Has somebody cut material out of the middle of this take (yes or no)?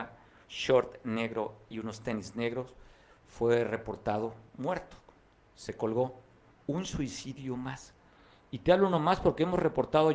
no